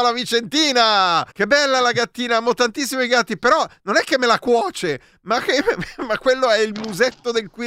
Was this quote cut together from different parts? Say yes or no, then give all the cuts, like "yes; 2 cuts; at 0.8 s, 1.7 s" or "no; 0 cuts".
yes; 1 cut; at 1.3 s